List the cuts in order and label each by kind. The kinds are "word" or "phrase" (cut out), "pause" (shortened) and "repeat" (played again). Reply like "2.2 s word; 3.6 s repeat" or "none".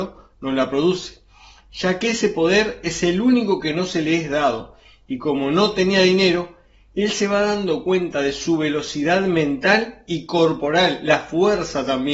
none